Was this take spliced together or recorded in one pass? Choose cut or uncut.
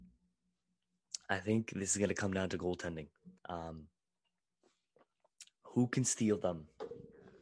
cut